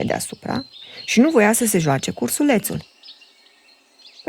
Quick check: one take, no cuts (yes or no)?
yes